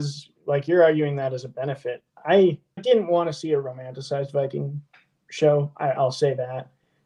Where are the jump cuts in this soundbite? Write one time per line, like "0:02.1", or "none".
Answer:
0:02.8